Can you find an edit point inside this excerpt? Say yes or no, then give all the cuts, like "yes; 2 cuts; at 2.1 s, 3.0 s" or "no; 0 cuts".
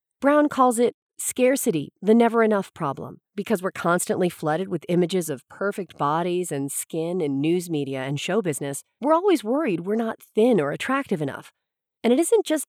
yes; 1 cut; at 3.3 s